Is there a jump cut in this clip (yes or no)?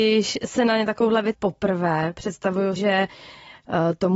yes